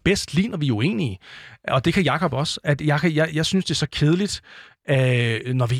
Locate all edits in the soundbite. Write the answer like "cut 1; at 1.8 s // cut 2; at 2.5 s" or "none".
none

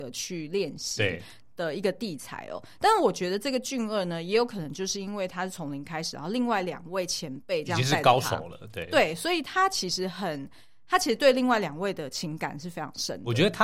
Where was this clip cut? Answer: none

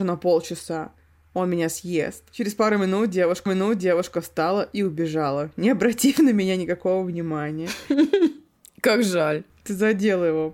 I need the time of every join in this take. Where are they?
cut 1; at 3.5 s

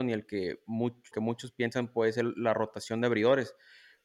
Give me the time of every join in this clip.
cut 1; at 1.1 s

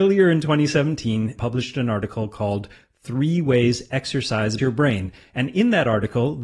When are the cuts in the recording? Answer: cut 1; at 1.4 s // cut 2; at 4.6 s

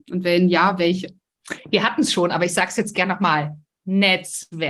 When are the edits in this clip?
none

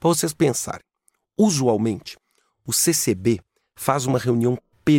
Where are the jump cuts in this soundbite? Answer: none

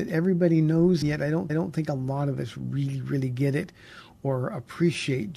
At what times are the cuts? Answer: cut 1; at 1.0 s // cut 2; at 1.5 s

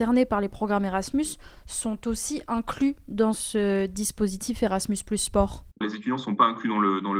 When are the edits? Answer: cut 1; at 5.8 s

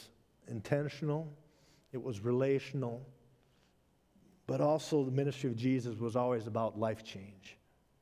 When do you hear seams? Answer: none

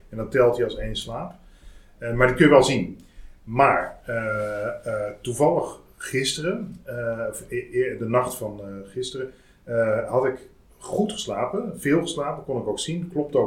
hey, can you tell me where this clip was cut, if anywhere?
none

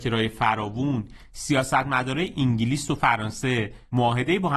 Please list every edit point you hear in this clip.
none

